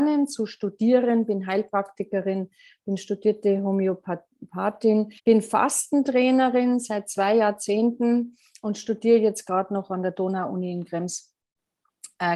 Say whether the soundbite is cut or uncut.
cut